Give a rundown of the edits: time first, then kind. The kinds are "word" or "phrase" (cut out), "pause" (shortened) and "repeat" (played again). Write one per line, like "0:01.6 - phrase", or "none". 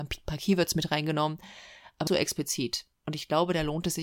0:02.1 - word
0:03.0 - pause